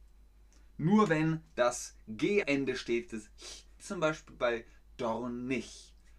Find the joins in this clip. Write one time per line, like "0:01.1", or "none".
0:02.4
0:03.1
0:03.8